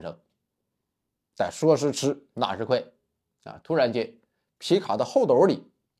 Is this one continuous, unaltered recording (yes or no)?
yes